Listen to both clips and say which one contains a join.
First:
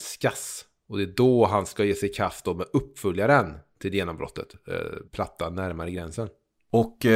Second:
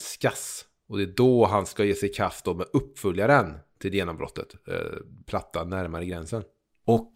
first; 1 cut; at 5.1 s

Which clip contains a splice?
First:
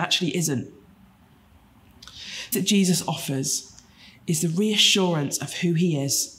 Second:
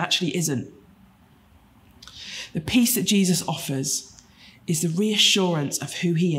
first; 1 cut; at 2.5 s

